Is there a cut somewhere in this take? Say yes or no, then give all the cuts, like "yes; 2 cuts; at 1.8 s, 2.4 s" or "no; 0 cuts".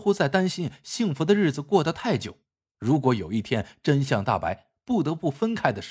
no; 0 cuts